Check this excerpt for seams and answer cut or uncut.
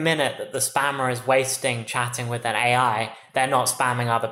uncut